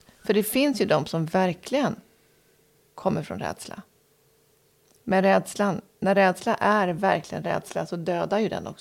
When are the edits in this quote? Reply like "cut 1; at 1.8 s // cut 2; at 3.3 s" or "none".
none